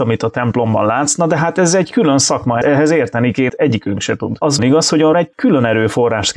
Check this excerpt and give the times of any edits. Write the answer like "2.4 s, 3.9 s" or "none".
2.6 s, 3.5 s, 4.6 s, 5.1 s

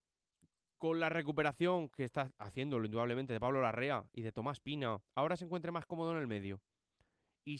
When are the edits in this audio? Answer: 5.0 s

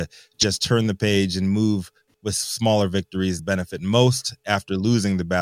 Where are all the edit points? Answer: 2.1 s, 3.4 s

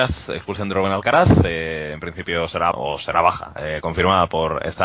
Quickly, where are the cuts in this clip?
2.7 s

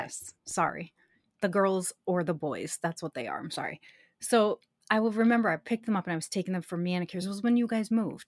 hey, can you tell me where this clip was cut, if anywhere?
none

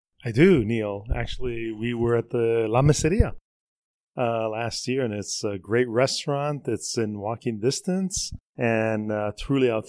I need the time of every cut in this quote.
8.5 s

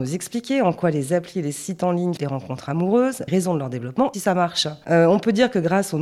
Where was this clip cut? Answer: 2.2 s, 3.3 s, 4.1 s

